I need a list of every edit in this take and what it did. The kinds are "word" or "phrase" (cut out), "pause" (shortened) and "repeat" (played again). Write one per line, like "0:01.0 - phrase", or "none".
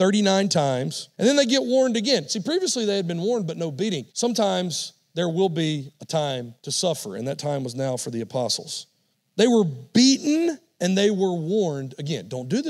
0:01.1 - pause
0:04.1 - pause
0:06.6 - pause
0:09.1 - pause